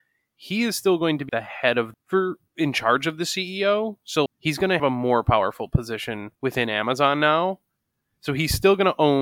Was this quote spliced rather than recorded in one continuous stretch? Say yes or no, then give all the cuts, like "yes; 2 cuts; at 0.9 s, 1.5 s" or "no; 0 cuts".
yes; 6 cuts; at 1.3 s, 1.9 s, 2.5 s, 4.3 s, 4.8 s, 6.4 s